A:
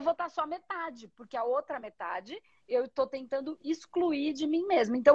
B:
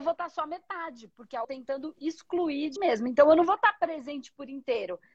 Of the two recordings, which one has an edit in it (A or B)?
B